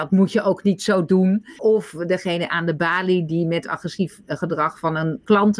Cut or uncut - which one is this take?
cut